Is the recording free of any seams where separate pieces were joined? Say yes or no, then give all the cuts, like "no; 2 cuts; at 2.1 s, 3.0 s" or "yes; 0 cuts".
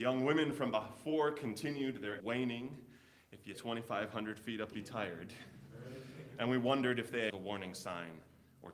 no; 4 cuts; at 2.2 s, 3.5 s, 4.7 s, 7.3 s